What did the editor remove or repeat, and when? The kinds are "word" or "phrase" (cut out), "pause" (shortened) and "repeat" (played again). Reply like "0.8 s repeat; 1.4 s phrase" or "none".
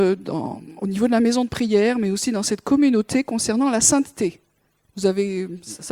none